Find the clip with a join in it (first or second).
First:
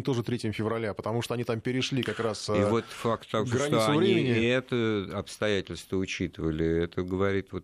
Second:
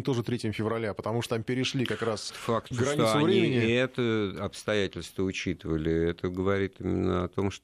second